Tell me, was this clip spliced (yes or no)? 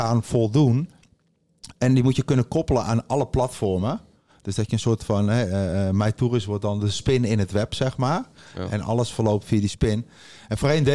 no